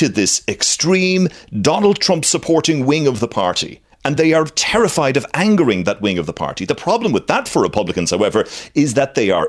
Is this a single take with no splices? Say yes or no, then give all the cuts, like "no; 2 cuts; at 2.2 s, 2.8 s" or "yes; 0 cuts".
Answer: yes; 0 cuts